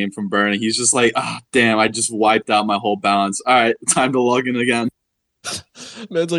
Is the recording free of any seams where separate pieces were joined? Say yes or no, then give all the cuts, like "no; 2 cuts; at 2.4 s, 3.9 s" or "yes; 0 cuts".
yes; 0 cuts